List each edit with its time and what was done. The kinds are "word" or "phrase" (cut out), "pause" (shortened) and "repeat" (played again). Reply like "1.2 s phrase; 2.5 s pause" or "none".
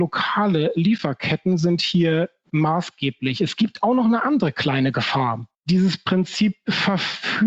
5.5 s pause